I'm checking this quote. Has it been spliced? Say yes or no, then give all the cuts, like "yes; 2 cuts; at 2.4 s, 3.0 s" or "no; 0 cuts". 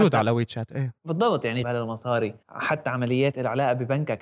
yes; 3 cuts; at 1.0 s, 1.6 s, 2.4 s